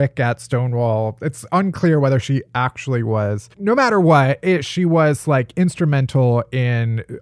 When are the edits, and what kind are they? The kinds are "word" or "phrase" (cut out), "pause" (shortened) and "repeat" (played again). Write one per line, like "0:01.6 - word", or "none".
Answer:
0:03.5 - pause